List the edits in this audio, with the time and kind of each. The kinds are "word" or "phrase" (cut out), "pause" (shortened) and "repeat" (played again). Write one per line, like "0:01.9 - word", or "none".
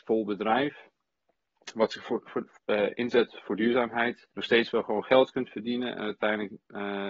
0:02.6 - pause
0:04.3 - pause